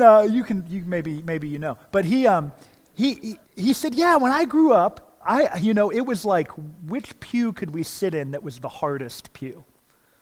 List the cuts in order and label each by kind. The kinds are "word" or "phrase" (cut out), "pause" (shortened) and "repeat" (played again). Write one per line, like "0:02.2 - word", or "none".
0:03.5 - pause